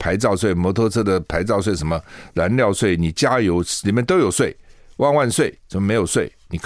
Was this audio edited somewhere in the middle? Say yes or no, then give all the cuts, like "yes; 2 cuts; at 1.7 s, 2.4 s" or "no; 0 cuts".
no; 0 cuts